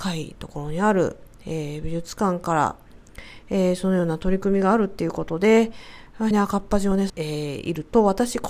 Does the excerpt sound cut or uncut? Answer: cut